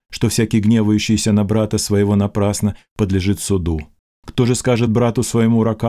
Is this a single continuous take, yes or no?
yes